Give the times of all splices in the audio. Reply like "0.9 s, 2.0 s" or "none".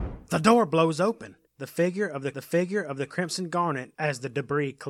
1.5 s, 2.3 s, 3.9 s